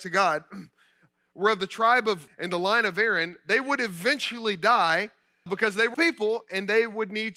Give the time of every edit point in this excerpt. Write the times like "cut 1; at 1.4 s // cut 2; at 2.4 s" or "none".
cut 1; at 2.3 s // cut 2; at 5.5 s // cut 3; at 5.9 s

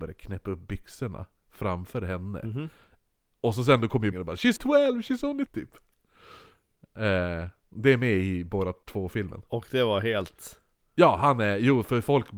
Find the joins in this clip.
cut 1; at 4.1 s // cut 2; at 4.6 s // cut 3; at 5.5 s // cut 4; at 8.8 s

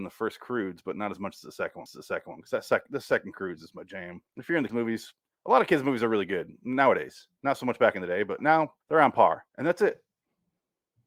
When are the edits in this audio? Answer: cut 1; at 1.9 s // cut 2; at 4.3 s // cut 3; at 4.7 s // cut 4; at 5.3 s // cut 5; at 8.4 s // cut 6; at 8.8 s // cut 7; at 9.5 s

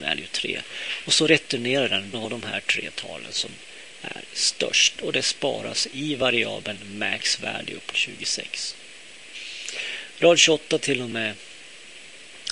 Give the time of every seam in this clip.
cut 1; at 2.1 s // cut 2; at 7.9 s

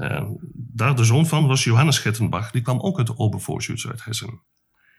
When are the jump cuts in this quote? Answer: none

